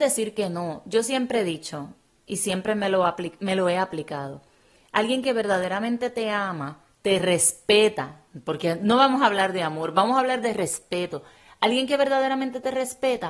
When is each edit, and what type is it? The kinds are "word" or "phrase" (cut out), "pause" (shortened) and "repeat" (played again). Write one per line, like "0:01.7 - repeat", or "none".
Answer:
none